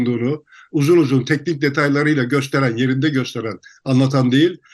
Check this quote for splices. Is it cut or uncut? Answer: uncut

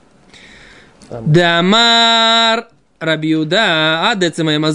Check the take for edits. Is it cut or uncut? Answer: uncut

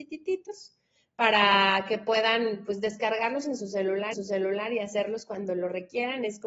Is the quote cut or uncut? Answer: cut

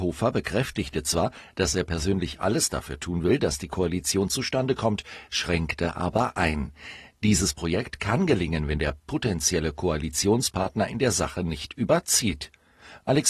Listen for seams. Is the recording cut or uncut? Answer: uncut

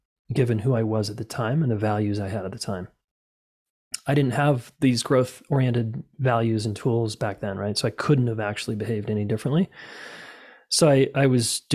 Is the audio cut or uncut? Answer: uncut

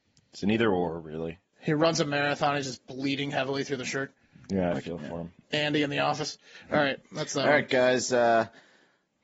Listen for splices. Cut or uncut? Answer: uncut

